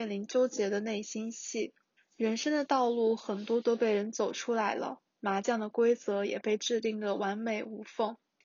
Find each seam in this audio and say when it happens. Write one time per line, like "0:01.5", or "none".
0:02.0
0:05.1